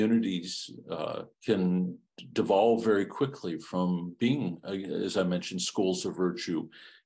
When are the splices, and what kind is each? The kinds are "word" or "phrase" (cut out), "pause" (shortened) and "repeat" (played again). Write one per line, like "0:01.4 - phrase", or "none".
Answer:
0:01.3 - pause